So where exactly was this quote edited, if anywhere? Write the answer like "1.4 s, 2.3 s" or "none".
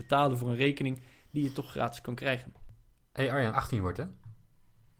3.5 s